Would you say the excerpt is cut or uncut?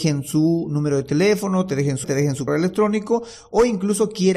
cut